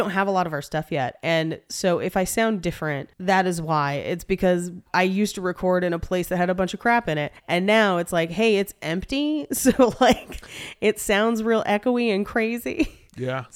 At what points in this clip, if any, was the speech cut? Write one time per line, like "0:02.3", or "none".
0:03.1
0:07.4